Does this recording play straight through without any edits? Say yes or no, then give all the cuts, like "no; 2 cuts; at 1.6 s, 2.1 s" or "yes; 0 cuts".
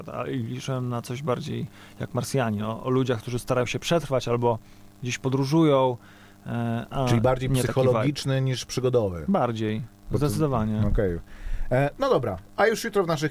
yes; 0 cuts